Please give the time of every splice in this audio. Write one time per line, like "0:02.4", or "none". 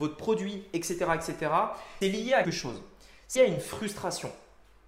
0:02.0
0:02.4
0:03.4